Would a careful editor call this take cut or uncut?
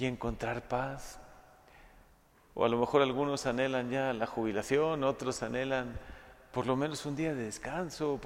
uncut